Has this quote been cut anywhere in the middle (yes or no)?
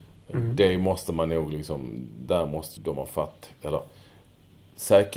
yes